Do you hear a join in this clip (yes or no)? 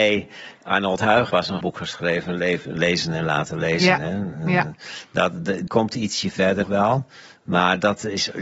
yes